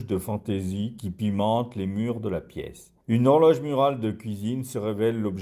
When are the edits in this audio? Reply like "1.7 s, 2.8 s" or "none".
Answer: 3.0 s